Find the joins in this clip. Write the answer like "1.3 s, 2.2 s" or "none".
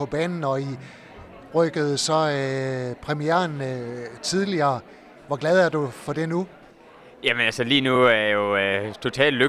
none